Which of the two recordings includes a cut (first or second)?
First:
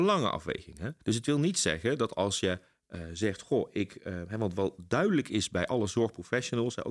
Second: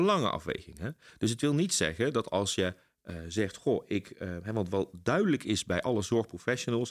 first